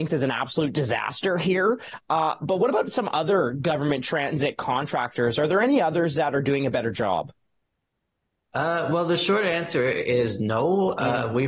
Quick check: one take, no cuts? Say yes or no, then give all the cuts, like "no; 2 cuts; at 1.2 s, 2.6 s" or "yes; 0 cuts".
yes; 0 cuts